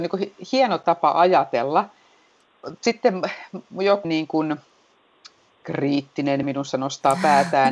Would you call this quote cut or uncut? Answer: cut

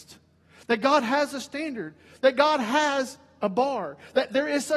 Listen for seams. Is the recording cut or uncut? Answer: uncut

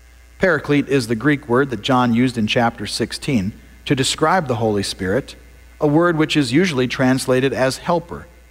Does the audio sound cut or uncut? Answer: uncut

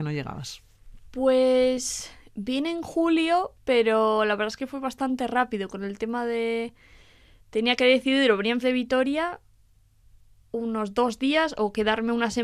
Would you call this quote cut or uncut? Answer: cut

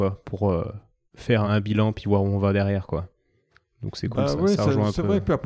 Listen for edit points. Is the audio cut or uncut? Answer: cut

